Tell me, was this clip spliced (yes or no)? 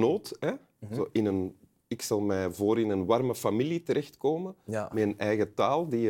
no